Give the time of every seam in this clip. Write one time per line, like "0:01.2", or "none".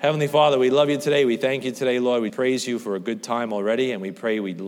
0:02.3

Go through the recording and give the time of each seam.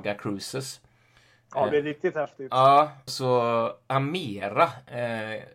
0:01.7
0:03.1

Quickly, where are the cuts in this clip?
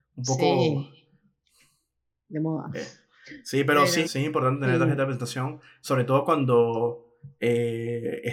0:04.0

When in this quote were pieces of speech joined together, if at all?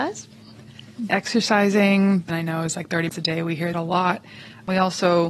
0:01.1
0:02.3
0:03.1
0:03.7

